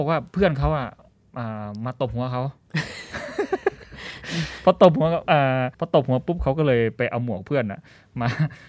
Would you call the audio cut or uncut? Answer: cut